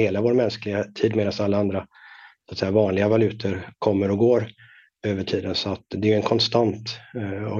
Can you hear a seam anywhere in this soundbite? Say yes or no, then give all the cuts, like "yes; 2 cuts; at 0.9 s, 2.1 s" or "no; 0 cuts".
no; 0 cuts